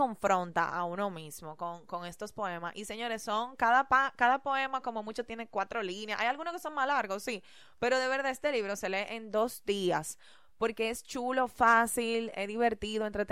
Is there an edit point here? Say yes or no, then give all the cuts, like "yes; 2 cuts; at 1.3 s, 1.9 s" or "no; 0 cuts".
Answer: no; 0 cuts